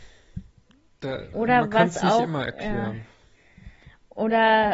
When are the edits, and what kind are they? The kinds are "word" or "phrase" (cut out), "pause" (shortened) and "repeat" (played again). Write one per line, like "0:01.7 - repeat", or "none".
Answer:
0:01.3 - word

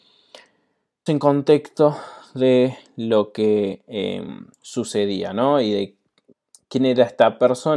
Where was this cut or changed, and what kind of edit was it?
0:01.1 - word
0:04.5 - pause

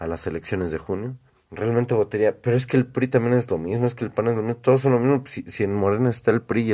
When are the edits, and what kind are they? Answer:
0:01.3 - pause

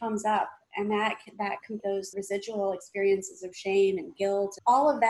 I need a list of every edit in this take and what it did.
0:01.8 - word
0:02.1 - word

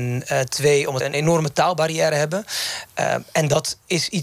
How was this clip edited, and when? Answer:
0:01.0 - word

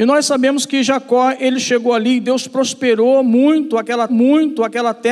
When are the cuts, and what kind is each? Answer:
0:04.1 - repeat

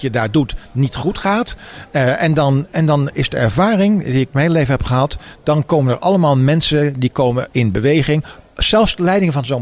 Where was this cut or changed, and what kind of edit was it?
0:07.5 - word

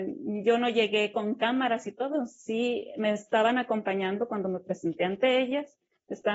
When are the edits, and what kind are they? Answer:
none

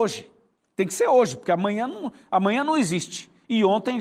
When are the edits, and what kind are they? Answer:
none

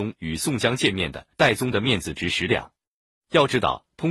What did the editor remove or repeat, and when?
0:01.3 - pause

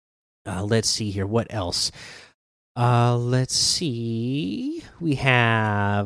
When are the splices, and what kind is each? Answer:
none

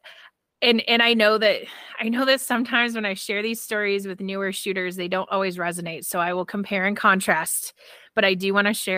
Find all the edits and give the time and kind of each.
none

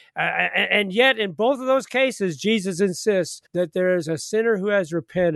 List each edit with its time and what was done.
0:03.5 - pause

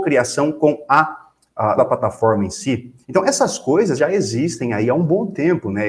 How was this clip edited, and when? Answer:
0:01.8 - word
0:03.0 - pause
0:04.0 - word

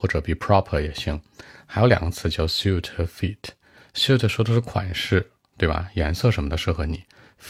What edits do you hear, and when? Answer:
none

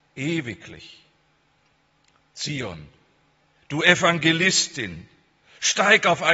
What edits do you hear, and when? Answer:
none

